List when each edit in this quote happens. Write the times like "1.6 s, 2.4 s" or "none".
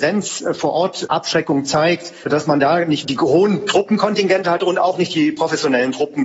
3.0 s